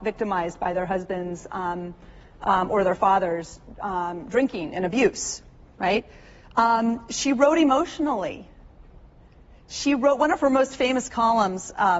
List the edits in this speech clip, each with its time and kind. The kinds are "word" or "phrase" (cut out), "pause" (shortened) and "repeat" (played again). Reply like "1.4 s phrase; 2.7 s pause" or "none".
none

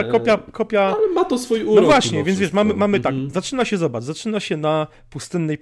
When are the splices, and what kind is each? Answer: none

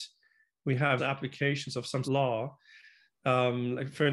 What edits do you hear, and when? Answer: 1.0 s word; 2.0 s word

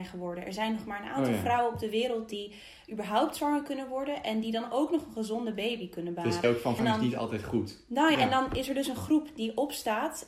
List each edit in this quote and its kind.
6.4 s word; 6.8 s word; 8.1 s word

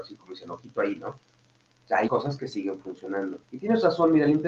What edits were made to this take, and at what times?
2.1 s word; 3.4 s pause

